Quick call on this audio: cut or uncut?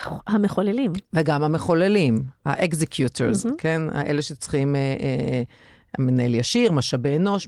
uncut